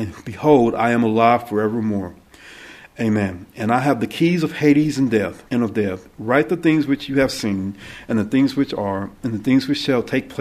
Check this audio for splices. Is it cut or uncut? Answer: cut